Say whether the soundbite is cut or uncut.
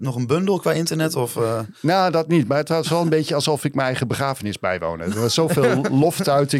uncut